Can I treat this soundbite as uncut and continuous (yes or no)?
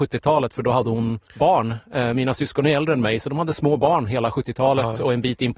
no